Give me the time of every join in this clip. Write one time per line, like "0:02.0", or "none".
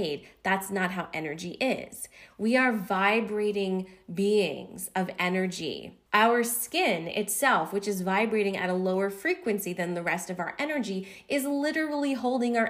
0:06.1